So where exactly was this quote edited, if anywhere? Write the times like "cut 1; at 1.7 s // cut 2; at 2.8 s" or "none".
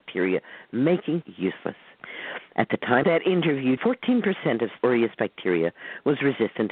cut 1; at 1.2 s // cut 2; at 3.0 s // cut 3; at 3.8 s // cut 4; at 4.8 s

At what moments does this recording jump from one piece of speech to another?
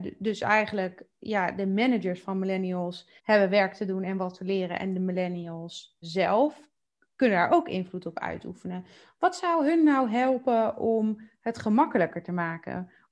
cut 1; at 3.2 s // cut 2; at 6.0 s

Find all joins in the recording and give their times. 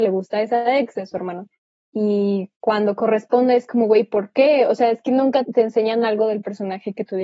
cut 1; at 5.4 s

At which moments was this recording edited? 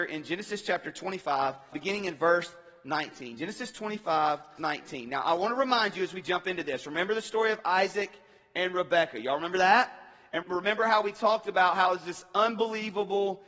cut 1; at 1.7 s // cut 2; at 4.6 s // cut 3; at 10.4 s

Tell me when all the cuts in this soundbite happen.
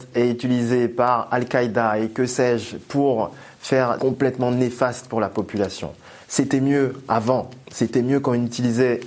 cut 1; at 4.0 s // cut 2; at 6.2 s // cut 3; at 7.6 s

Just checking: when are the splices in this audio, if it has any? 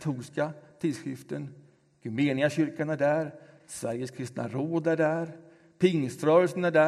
none

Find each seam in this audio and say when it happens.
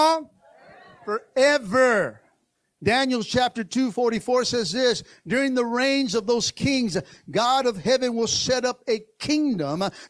none

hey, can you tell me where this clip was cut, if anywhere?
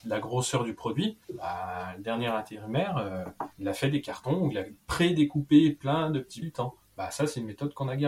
cut 1; at 1.2 s // cut 2; at 3.5 s // cut 3; at 6.4 s

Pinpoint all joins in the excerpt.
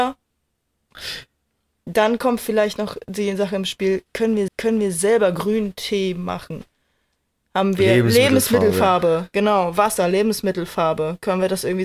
cut 1; at 4.5 s

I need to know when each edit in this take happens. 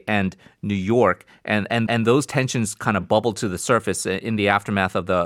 cut 1; at 1.9 s

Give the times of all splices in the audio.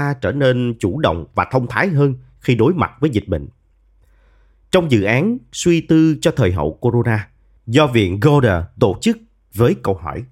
none

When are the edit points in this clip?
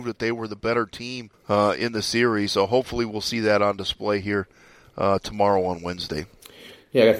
cut 1; at 1.3 s

